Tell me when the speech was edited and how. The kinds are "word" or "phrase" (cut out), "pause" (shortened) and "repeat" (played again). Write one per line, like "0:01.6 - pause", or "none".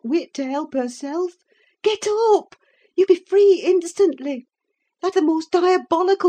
0:03.1 - word
0:05.1 - word